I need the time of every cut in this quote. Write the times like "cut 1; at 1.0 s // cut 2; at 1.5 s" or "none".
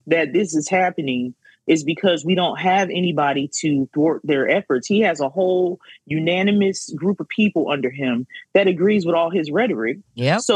none